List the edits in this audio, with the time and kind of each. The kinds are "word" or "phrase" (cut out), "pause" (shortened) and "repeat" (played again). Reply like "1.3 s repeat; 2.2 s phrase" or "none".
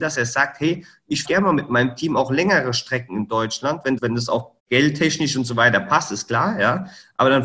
1.2 s word; 4.0 s word; 4.6 s pause